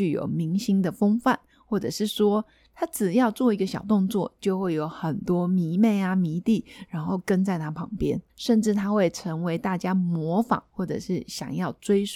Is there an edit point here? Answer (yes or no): yes